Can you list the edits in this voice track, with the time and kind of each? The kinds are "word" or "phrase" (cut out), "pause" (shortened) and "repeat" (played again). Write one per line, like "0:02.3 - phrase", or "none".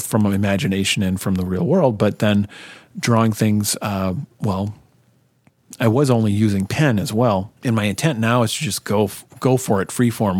0:04.3 - pause
0:07.6 - pause